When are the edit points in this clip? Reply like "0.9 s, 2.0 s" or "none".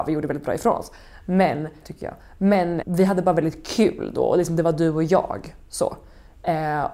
1.8 s, 2.8 s